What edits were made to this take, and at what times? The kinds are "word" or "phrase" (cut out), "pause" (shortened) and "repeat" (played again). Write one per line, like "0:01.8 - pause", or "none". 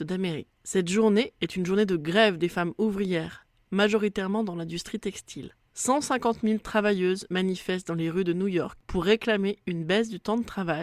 none